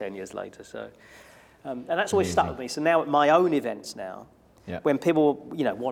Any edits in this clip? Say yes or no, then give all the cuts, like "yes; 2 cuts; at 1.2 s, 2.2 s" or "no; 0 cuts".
no; 0 cuts